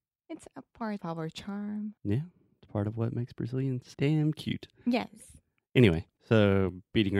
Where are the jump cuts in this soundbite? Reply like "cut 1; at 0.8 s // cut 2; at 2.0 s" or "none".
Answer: cut 1; at 1.0 s // cut 2; at 2.0 s // cut 3; at 3.9 s // cut 4; at 6.2 s